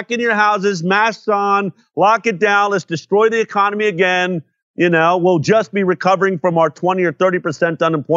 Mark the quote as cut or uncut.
uncut